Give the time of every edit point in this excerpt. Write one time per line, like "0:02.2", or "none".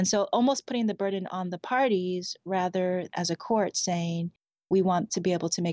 0:03.1